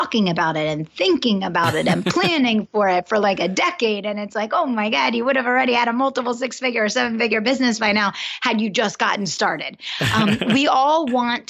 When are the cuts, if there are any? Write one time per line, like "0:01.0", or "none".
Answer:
none